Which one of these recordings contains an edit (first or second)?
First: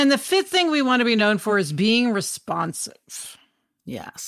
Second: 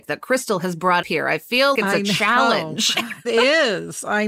second